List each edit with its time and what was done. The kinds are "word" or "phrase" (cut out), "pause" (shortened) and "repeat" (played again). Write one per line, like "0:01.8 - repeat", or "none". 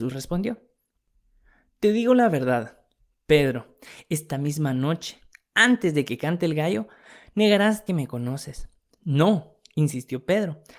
0:07.9 - phrase